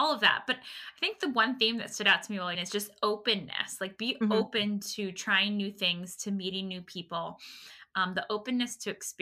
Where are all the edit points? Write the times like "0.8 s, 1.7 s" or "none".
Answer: 2.5 s